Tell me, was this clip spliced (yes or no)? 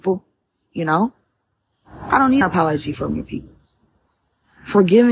yes